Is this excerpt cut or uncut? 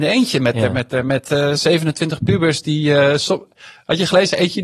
uncut